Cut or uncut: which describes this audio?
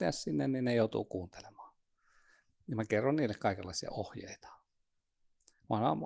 uncut